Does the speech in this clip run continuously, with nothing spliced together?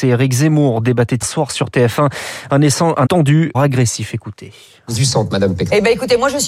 no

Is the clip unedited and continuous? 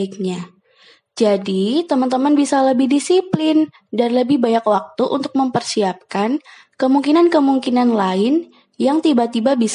yes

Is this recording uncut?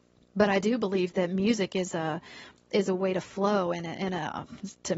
yes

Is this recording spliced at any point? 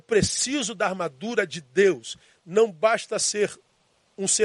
no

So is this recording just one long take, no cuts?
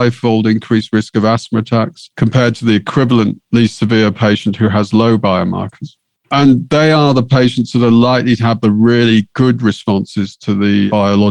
yes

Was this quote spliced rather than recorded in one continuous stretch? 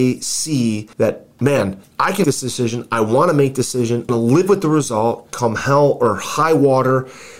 yes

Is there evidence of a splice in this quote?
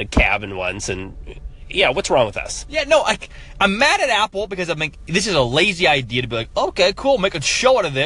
no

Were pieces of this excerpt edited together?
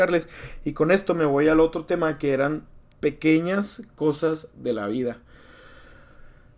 yes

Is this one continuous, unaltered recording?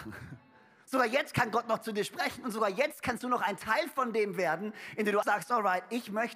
no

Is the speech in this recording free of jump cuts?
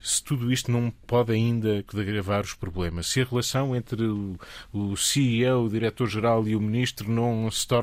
no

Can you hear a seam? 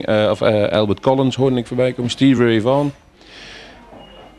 no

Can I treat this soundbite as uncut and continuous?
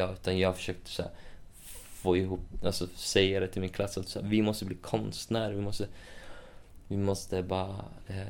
yes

